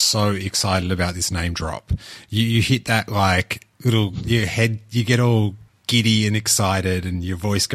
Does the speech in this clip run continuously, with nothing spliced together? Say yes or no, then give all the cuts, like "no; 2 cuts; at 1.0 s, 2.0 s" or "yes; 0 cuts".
no; 2 cuts; at 3.7 s, 5.7 s